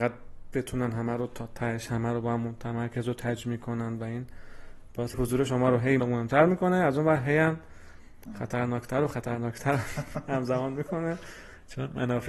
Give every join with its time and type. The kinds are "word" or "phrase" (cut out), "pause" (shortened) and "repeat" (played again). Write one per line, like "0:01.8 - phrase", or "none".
0:05.1 - word
0:06.0 - word